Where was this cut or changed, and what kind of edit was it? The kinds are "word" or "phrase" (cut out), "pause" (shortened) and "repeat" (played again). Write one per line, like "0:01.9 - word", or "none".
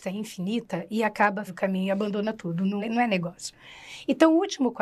0:01.5 - phrase
0:02.8 - word